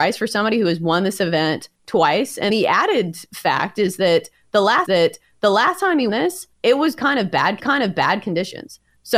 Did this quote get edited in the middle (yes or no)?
yes